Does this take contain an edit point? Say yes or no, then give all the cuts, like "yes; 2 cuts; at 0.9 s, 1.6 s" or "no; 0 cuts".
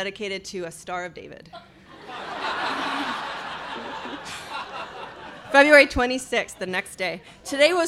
no; 0 cuts